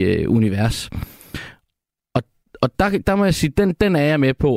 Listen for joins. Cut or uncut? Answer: uncut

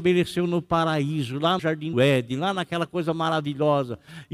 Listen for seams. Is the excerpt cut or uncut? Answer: cut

